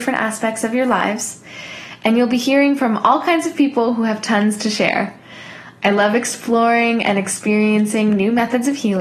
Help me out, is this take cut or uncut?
uncut